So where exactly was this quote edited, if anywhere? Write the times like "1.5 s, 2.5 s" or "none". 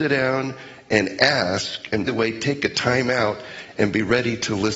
2.1 s